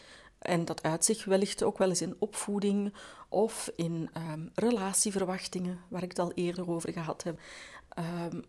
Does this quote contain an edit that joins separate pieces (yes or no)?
no